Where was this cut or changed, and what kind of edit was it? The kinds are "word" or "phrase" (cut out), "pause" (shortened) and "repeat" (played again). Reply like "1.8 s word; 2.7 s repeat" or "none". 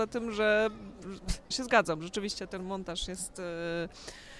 1.5 s word